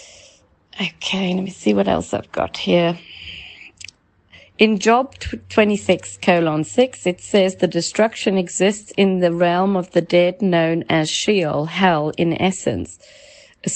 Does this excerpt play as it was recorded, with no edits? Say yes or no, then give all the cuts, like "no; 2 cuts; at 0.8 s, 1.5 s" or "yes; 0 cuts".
yes; 0 cuts